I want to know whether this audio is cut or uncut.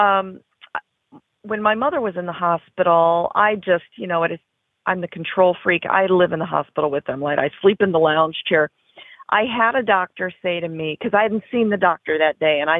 uncut